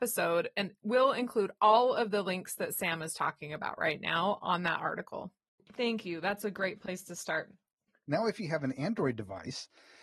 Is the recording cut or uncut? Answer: uncut